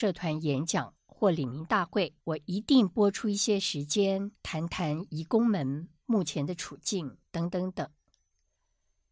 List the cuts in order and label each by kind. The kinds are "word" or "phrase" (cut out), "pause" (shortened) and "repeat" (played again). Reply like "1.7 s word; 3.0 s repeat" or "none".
2.2 s pause; 4.4 s pause; 7.3 s pause